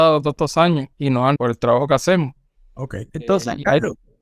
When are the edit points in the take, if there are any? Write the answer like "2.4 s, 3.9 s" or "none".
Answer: 0.9 s, 1.4 s, 3.1 s